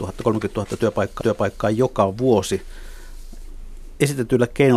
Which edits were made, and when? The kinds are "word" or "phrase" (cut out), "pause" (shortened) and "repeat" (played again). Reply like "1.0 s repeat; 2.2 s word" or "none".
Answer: 1.2 s repeat